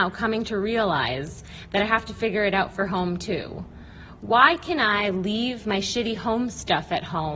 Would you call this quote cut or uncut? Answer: uncut